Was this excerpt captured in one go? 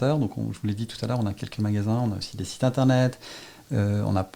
yes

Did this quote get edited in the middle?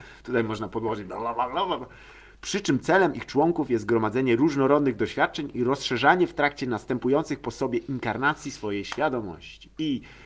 no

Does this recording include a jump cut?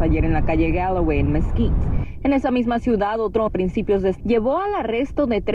yes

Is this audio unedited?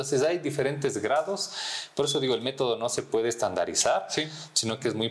yes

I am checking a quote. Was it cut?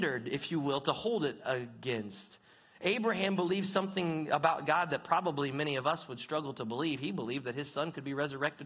no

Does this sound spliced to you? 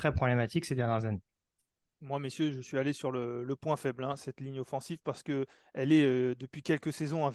no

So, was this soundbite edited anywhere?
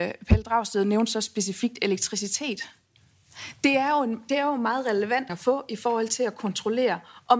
yes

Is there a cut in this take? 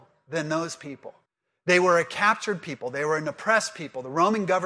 yes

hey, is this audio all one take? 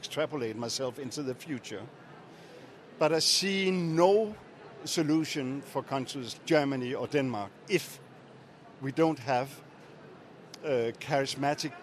no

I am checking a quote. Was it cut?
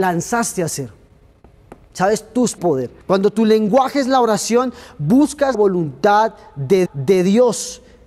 yes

